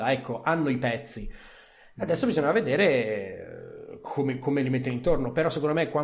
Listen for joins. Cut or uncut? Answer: uncut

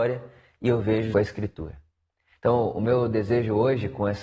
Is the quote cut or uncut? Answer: cut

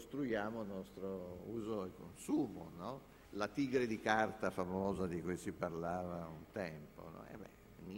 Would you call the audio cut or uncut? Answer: cut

